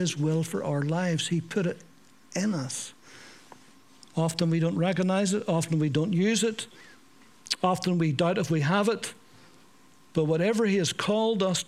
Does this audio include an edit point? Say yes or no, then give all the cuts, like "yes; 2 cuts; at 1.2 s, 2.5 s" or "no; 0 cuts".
no; 0 cuts